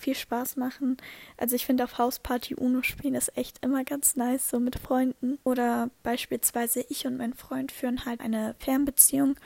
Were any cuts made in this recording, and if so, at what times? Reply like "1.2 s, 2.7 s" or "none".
5.4 s, 8.2 s